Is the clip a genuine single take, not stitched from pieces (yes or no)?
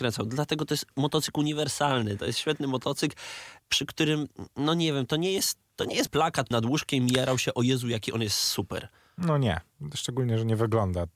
no